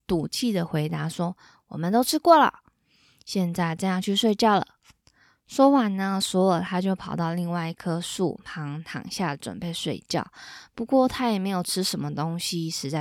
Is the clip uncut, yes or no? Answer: yes